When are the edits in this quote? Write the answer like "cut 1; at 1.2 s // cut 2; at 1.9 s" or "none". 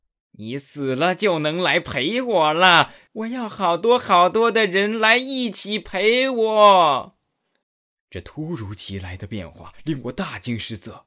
cut 1; at 3.1 s // cut 2; at 7.6 s

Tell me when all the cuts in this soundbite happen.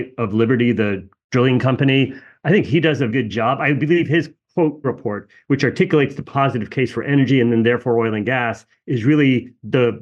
cut 1; at 3.1 s // cut 2; at 4.8 s

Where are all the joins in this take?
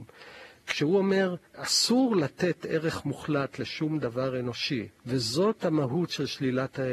cut 1; at 1.5 s // cut 2; at 5.0 s

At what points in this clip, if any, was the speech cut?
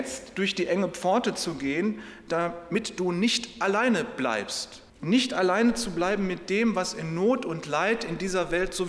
cut 1; at 4.9 s

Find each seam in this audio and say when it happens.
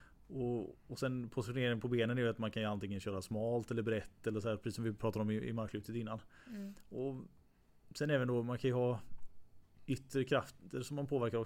none

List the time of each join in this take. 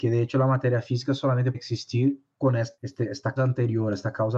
cut 1; at 1.5 s // cut 2; at 2.3 s // cut 3; at 3.4 s

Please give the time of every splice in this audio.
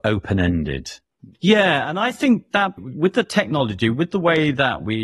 cut 1; at 1.3 s // cut 2; at 2.8 s

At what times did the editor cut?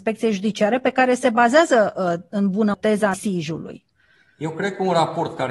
cut 1; at 2.7 s // cut 2; at 3.1 s

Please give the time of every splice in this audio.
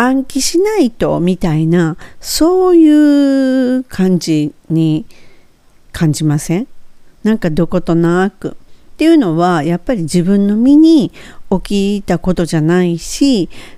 cut 1; at 4.6 s

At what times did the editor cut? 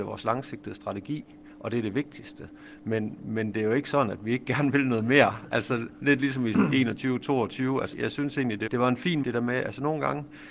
cut 1; at 6.5 s // cut 2; at 7.9 s // cut 3; at 8.7 s // cut 4; at 9.2 s

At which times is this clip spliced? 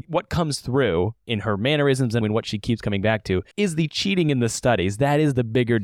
cut 1; at 2.2 s // cut 2; at 3.5 s

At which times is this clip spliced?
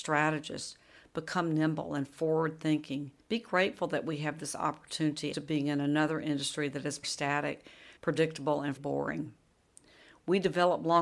cut 1; at 3.2 s // cut 2; at 5.3 s // cut 3; at 7.0 s // cut 4; at 8.0 s // cut 5; at 8.8 s

